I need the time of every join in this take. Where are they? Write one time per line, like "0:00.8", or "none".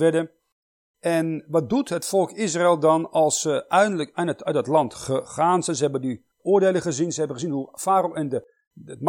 0:06.3